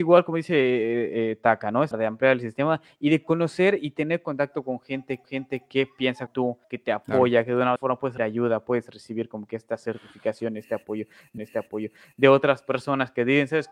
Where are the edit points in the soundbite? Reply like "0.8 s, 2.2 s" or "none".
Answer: 1.9 s, 5.2 s, 6.3 s, 6.6 s, 7.8 s, 8.2 s, 11.4 s